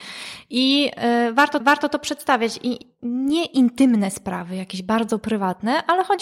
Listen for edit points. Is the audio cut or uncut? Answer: cut